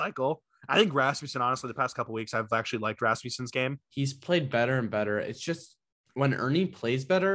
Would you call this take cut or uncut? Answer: uncut